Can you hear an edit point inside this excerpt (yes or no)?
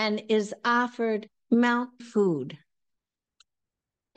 yes